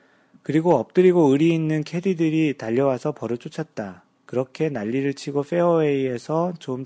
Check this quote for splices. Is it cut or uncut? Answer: cut